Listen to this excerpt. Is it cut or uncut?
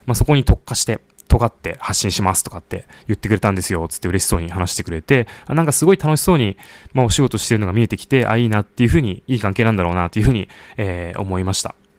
uncut